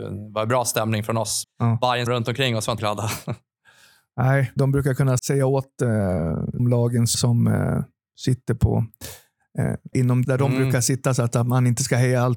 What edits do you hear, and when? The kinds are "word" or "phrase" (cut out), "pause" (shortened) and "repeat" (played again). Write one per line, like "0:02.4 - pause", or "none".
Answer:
0:01.4 - word
0:02.1 - word
0:02.8 - word
0:04.6 - word
0:05.2 - word
0:06.6 - word
0:07.1 - word
0:09.9 - word
0:10.2 - word